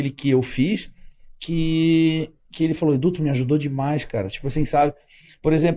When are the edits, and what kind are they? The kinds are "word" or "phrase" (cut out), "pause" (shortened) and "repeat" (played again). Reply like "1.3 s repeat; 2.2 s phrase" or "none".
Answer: none